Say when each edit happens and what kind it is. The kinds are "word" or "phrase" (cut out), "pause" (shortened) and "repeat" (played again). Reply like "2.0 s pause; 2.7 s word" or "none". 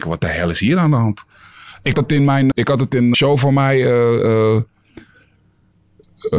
1.9 s word; 2.5 s word; 3.1 s word